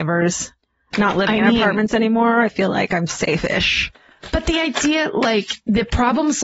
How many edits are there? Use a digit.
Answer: 0